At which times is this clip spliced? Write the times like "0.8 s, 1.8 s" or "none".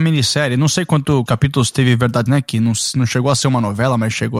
1.3 s, 2.3 s